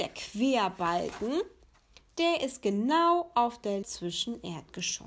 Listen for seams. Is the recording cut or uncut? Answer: cut